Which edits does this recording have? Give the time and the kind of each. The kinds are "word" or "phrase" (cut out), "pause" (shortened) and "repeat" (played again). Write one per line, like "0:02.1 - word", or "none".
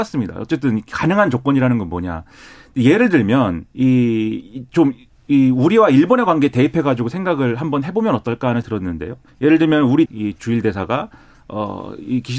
0:03.7 - pause
0:08.6 - word
0:09.3 - pause
0:10.1 - word